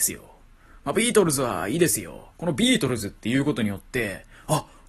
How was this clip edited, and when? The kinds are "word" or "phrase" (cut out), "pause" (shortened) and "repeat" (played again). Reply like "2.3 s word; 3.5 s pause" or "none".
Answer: 2.3 s pause